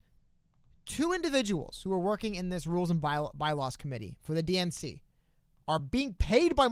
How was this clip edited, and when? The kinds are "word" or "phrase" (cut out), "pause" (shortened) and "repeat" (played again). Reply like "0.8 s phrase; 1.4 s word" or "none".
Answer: none